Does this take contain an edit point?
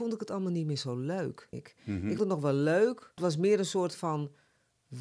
yes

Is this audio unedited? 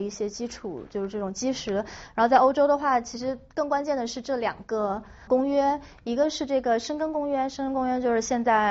no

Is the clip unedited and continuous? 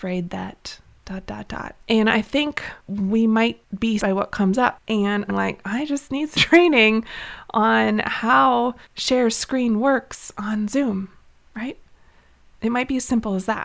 no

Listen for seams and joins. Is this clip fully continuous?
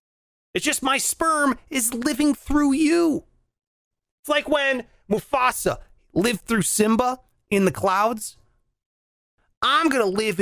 yes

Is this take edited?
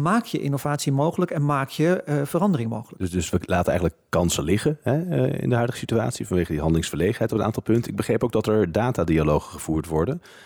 no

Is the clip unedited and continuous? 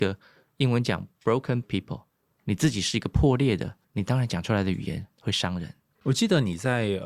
no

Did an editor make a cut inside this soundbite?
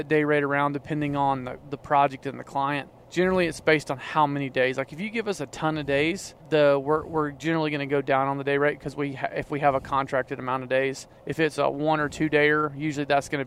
yes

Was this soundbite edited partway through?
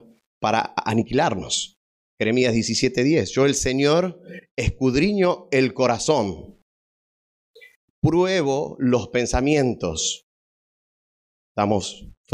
no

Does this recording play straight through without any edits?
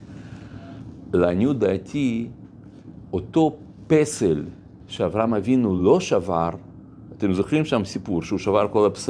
yes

